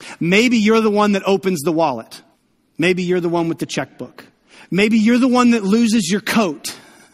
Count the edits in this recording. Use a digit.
1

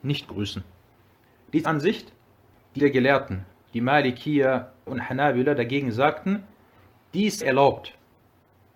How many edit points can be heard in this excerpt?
4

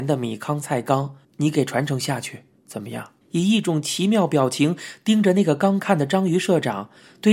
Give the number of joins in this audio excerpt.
2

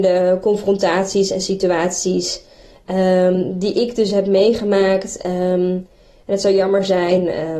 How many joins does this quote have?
0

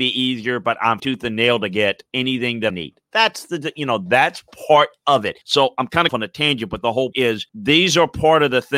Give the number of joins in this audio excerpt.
7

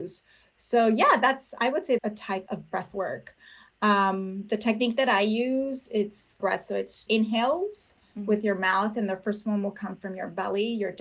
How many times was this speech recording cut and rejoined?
4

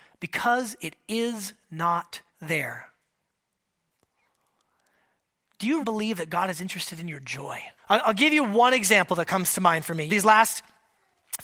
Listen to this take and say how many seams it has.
4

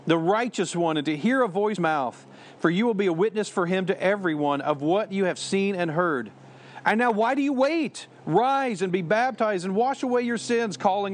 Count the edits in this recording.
1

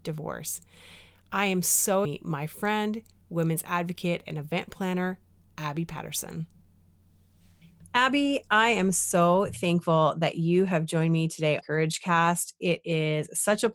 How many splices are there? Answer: 2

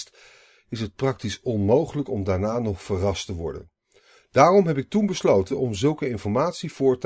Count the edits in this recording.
0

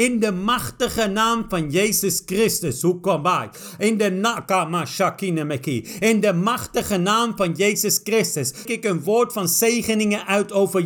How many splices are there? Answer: 1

